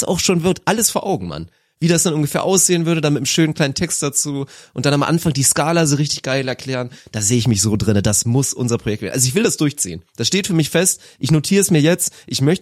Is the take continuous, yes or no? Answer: yes